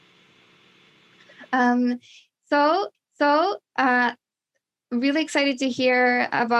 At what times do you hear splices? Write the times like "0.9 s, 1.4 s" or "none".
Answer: 2.9 s